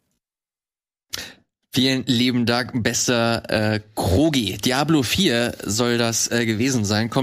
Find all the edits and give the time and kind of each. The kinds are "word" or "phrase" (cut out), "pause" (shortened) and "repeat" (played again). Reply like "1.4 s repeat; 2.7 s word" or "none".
none